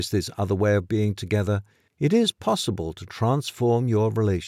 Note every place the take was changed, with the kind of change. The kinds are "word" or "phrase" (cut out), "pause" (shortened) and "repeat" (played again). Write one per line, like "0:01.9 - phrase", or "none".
none